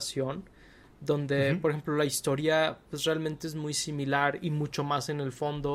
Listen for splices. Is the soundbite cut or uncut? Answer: uncut